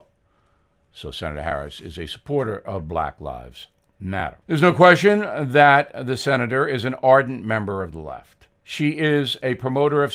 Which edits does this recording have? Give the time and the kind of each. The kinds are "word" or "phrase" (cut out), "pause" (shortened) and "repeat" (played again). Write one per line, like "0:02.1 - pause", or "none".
0:04.4 - pause
0:08.6 - pause